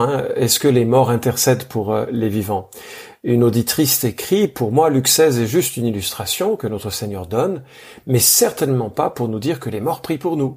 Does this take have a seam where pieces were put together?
no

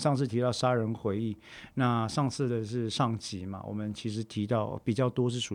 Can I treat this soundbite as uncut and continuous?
yes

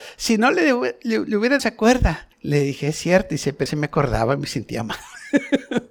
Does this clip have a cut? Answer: yes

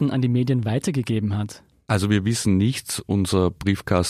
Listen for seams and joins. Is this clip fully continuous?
yes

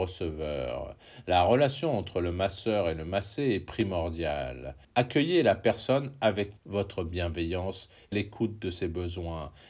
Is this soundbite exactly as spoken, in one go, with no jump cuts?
no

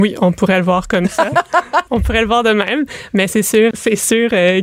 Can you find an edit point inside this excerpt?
yes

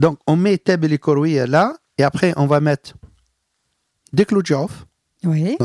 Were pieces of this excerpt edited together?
no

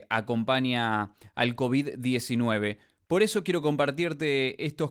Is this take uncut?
yes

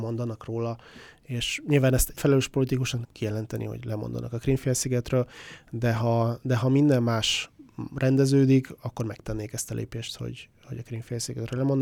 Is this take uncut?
no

